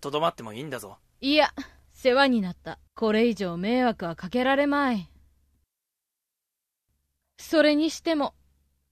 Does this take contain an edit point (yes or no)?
yes